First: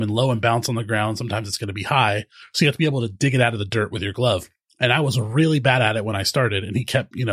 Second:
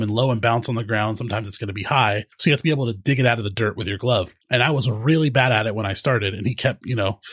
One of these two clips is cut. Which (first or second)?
second